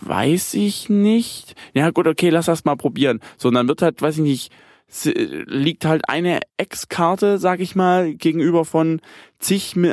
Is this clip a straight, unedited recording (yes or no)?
no